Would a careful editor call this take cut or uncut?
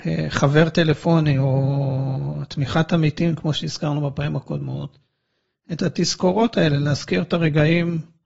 uncut